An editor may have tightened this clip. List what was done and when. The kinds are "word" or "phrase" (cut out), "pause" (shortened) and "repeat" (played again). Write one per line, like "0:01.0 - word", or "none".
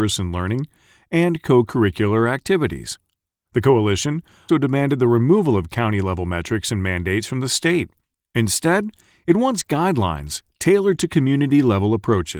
0:04.5 - word